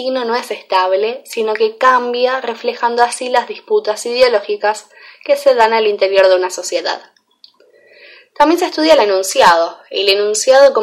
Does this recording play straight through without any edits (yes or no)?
yes